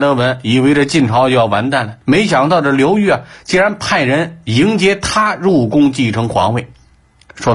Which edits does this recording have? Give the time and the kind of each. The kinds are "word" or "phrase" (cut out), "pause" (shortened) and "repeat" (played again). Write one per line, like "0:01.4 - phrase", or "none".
0:02.0 - pause